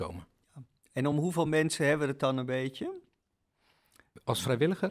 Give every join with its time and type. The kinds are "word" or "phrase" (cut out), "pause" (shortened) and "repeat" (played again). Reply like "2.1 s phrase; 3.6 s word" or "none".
none

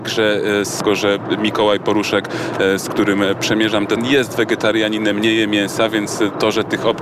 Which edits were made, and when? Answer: 4.0 s word

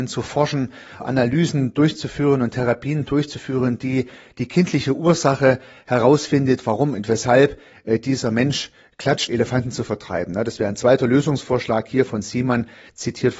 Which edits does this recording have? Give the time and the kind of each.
1.0 s word; 9.3 s word

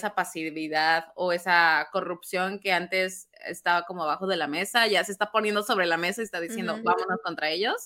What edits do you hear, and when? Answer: none

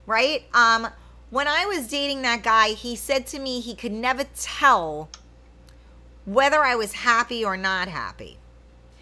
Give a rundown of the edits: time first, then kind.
none

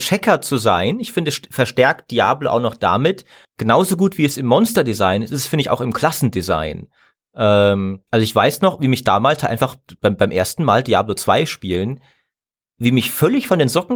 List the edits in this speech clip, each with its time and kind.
3.4 s pause; 8.1 s pause

